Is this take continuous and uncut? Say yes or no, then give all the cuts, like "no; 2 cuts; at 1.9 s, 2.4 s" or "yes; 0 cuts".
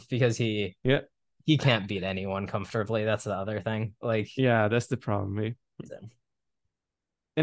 yes; 0 cuts